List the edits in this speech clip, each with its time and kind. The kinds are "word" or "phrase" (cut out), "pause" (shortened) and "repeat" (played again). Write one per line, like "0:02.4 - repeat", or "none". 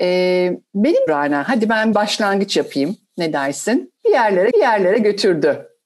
0:01.1 - phrase
0:01.9 - word
0:04.0 - pause
0:04.5 - repeat